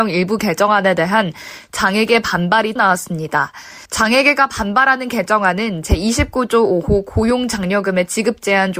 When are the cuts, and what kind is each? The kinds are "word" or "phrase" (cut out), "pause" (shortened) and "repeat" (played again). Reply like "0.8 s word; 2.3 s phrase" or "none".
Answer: 2.8 s word; 3.8 s pause